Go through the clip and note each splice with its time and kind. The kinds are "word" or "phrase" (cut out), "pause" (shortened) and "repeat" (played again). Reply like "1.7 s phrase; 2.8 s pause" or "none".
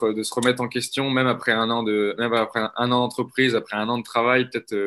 none

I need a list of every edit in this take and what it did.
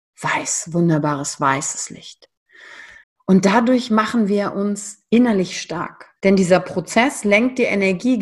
3.0 s pause; 6.2 s pause

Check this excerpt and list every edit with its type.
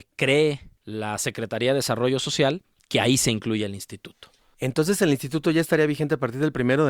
none

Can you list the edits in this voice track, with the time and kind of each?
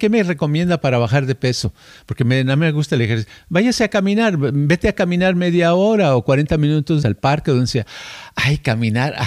7.0 s word

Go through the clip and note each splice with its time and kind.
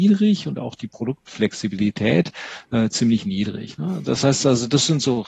none

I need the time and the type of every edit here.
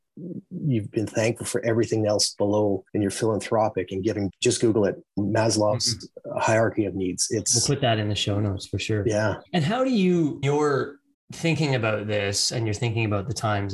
2.9 s pause; 4.3 s phrase; 5.2 s word; 9.5 s pause; 10.4 s word; 11.1 s pause

